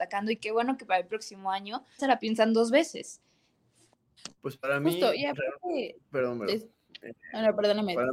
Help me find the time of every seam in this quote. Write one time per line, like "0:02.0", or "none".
0:02.0
0:04.4
0:06.0